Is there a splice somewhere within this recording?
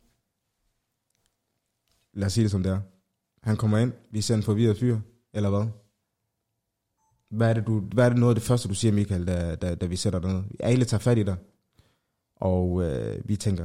no; 0 cuts

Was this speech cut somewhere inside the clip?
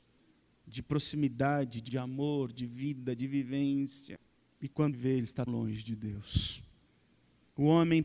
yes; 3 cuts; at 1.9 s, 4.9 s, 5.5 s

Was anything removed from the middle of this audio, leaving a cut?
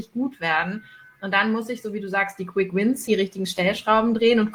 yes; 1 cut; at 3.1 s

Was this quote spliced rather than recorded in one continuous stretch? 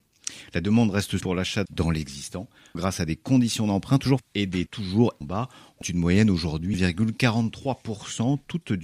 yes; 8 cuts; at 1.2 s, 1.7 s, 2.8 s, 4.2 s, 4.7 s, 5.2 s, 5.8 s, 6.7 s

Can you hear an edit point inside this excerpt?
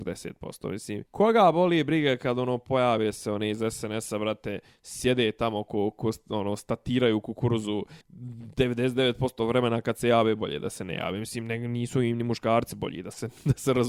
yes; 2 cuts; at 1.1 s, 8.0 s

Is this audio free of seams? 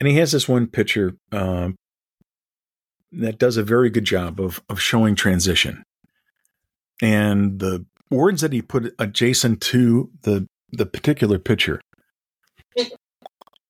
yes; 0 cuts

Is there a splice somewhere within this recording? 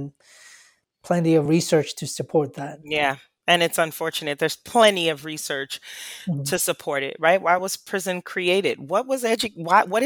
no; 0 cuts

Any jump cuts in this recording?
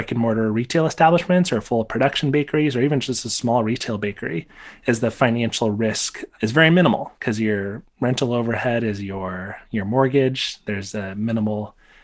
no; 0 cuts

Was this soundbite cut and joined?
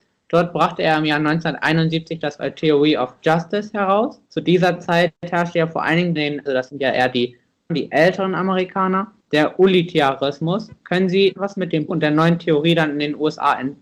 yes; 9 cuts; at 2.4 s, 4.3 s, 5.2 s, 6.2 s, 6.5 s, 7.7 s, 9.2 s, 11.4 s, 11.9 s

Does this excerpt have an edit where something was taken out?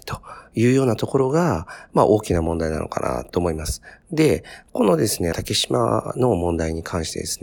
yes; 1 cut; at 5.3 s

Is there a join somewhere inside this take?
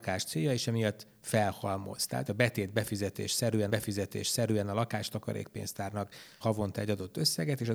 yes; 3 cuts; at 2.3 s, 3.7 s, 6.4 s

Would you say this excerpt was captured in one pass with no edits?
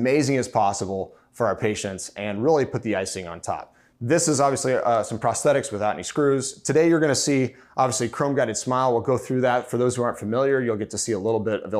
no; 1 cut; at 3.9 s

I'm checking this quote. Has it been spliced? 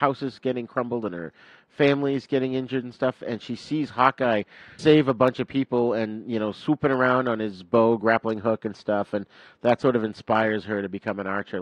yes; 1 cut; at 4.8 s

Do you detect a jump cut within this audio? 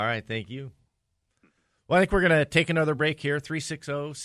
no; 0 cuts

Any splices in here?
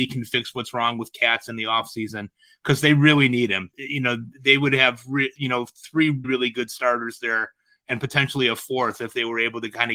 yes; 1 cut; at 6.2 s

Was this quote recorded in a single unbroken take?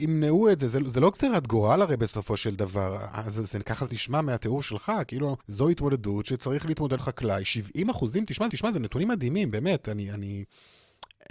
no; 4 cuts; at 3.9 s, 5.4 s, 7.0 s, 8.5 s

